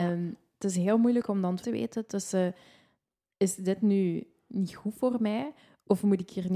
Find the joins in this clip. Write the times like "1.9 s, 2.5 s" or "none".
1.6 s

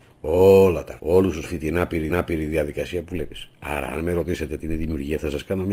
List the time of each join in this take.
1.0 s, 1.4 s, 2.1 s

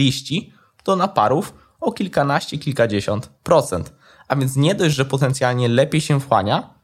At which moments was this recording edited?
3.4 s

